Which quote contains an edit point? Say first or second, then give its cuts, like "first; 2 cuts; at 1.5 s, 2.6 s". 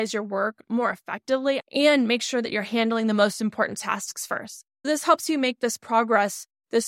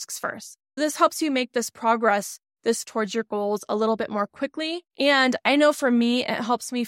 second; 1 cut; at 2.8 s